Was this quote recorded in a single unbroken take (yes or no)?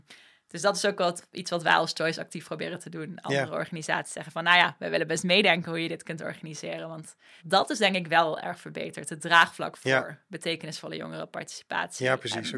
no